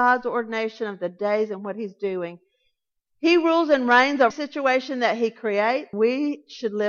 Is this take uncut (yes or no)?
no